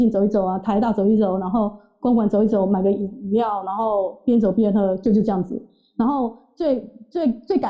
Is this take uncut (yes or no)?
yes